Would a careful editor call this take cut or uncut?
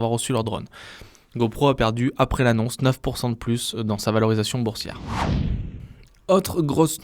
uncut